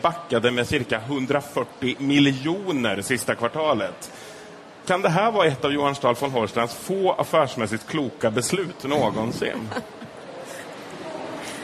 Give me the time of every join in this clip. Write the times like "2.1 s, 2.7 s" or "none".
none